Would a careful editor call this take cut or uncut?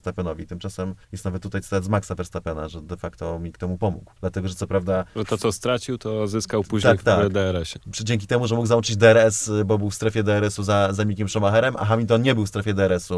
cut